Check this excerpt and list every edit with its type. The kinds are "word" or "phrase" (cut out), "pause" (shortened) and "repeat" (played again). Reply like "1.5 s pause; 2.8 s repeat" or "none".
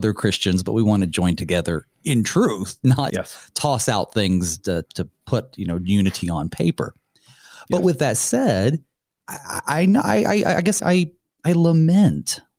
3.1 s word; 4.9 s word; 10.8 s word